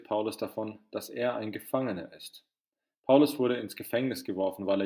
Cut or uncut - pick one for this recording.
uncut